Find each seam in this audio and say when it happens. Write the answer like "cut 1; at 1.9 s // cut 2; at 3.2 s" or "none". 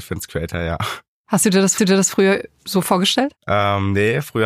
cut 1; at 1.8 s // cut 2; at 3.4 s